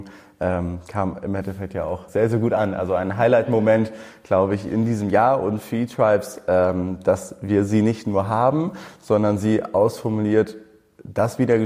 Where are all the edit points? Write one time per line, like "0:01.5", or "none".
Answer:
0:02.1